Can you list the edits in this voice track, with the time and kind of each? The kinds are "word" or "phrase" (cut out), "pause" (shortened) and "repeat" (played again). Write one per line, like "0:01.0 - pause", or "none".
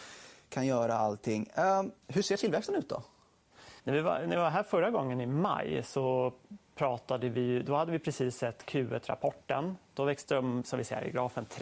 0:02.0 - pause
0:03.8 - pause